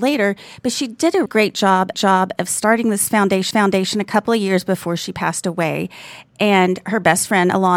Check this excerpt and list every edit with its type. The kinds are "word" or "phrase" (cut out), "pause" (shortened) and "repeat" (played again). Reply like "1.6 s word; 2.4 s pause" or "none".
1.3 s word; 1.9 s repeat; 3.5 s repeat